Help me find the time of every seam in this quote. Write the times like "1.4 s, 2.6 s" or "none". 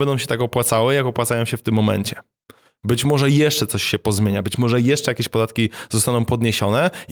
none